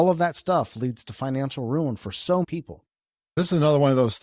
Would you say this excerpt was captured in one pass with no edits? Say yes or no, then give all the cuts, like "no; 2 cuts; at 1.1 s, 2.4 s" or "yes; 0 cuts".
no; 1 cut; at 2.4 s